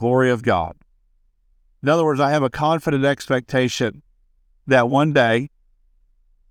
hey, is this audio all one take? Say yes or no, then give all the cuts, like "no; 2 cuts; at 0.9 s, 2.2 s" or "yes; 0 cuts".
yes; 0 cuts